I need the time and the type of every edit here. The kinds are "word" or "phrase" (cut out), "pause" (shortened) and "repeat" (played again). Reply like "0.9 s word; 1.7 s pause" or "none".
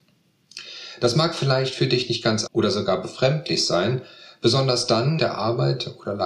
2.5 s word; 5.2 s phrase